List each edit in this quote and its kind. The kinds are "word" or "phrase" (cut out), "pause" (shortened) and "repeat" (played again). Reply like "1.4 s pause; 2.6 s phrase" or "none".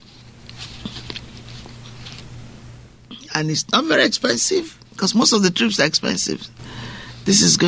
4.9 s pause